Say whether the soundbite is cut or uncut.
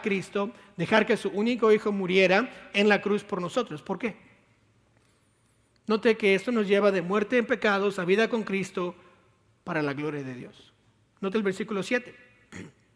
uncut